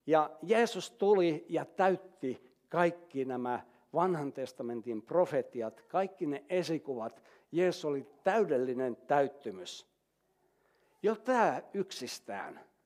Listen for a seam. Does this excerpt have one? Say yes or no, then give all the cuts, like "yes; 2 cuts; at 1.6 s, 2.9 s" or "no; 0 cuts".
no; 0 cuts